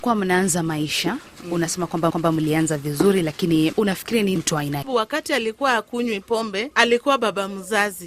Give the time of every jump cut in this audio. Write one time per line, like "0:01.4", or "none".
0:02.1
0:03.7
0:04.4
0:04.8